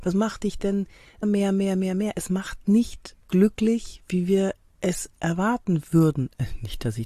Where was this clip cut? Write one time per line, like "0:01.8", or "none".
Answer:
0:01.2
0:03.2

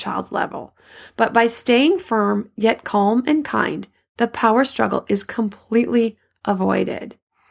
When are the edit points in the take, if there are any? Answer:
none

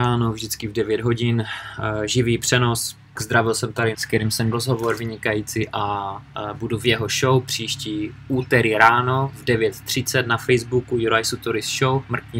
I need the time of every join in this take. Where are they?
0:03.2
0:03.9
0:04.5

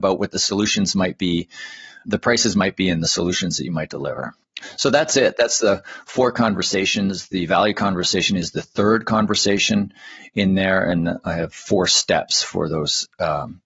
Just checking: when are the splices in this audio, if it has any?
0:02.0
0:11.5

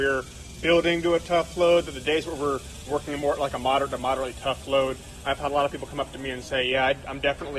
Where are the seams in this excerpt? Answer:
0:02.9

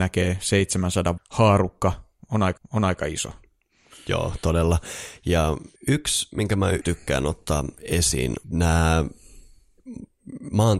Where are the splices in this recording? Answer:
0:01.2
0:02.6
0:05.8
0:06.8
0:08.4

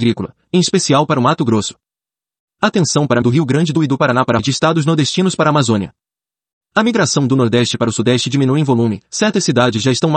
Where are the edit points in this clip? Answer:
0:03.2
0:03.7
0:04.4

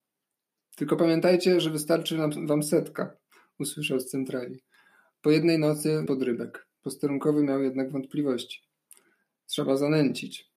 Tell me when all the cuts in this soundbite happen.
0:06.1
0:06.8

